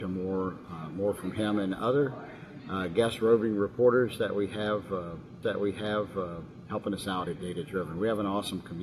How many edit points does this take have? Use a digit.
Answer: 2